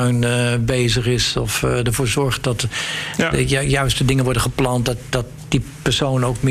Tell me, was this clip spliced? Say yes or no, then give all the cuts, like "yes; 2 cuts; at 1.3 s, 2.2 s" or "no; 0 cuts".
no; 0 cuts